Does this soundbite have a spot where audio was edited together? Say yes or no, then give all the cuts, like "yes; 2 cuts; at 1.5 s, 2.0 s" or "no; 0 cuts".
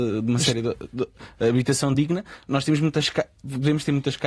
no; 0 cuts